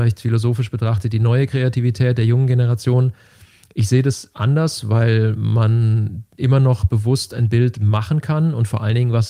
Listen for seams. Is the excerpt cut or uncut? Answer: uncut